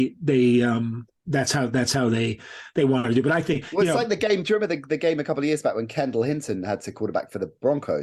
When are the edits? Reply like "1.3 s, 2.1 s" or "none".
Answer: 1.1 s